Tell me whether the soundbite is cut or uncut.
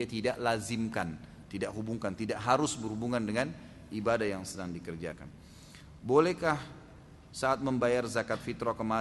uncut